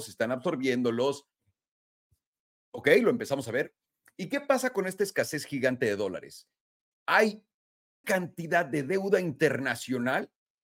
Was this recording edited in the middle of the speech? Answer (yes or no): yes